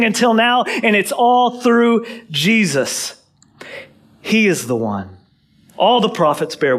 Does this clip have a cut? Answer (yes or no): no